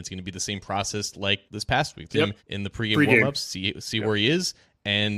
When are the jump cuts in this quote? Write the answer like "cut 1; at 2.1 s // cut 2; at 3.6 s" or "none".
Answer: cut 1; at 1.5 s // cut 2; at 2.1 s // cut 3; at 2.4 s